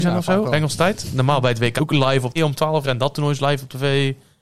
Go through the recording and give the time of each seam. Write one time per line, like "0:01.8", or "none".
0:01.8
0:02.4
0:02.8